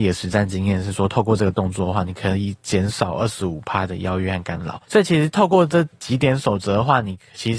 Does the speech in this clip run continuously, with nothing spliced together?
no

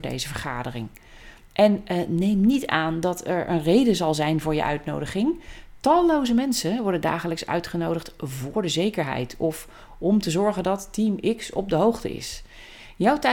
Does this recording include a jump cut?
no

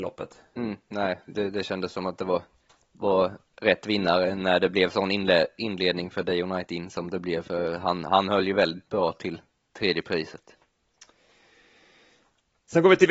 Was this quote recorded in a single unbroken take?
yes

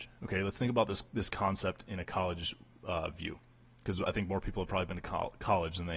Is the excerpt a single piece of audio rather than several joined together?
yes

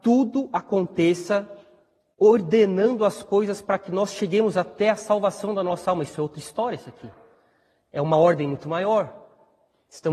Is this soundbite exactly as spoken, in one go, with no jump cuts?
yes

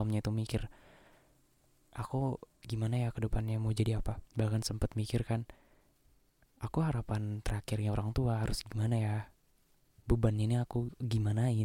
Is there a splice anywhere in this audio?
yes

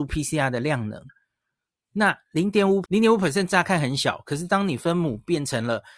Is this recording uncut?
no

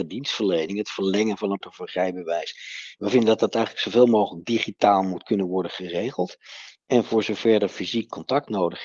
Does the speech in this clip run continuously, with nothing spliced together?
no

